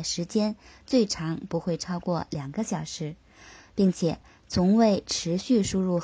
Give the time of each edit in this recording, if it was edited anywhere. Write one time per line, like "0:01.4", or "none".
none